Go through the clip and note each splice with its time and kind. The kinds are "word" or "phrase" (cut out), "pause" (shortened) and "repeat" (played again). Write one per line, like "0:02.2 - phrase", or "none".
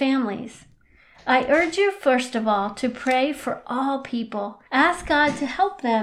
0:04.7 - pause